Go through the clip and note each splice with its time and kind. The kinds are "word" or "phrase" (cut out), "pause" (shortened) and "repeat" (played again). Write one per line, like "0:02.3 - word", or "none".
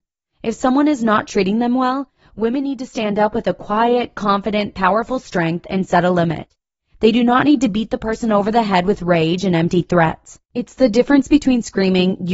0:10.4 - pause